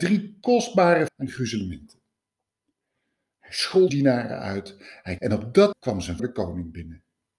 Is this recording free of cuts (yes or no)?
no